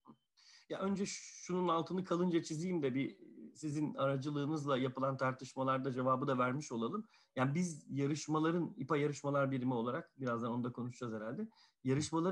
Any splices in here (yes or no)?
no